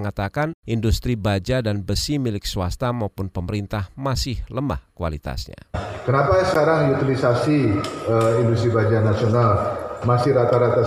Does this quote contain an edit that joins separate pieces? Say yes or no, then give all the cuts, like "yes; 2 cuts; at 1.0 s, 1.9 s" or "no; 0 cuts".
no; 0 cuts